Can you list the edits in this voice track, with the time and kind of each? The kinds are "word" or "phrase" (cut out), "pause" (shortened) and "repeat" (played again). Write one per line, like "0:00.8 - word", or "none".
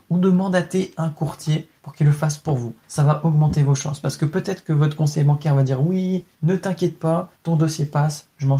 0:01.8 - pause
0:02.8 - pause
0:06.3 - pause
0:07.3 - pause